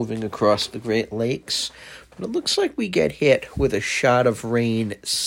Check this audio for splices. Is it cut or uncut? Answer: uncut